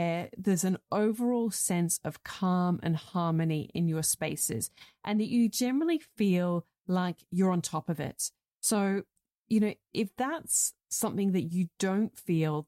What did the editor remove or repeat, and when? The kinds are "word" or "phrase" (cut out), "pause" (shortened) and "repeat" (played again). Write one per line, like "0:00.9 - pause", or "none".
none